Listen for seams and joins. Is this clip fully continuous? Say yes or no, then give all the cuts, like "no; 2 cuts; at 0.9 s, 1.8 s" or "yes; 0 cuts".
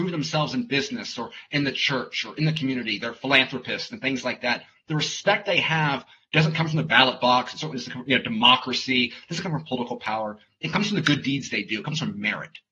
yes; 0 cuts